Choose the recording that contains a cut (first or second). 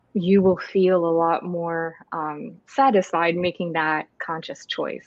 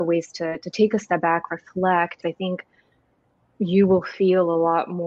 second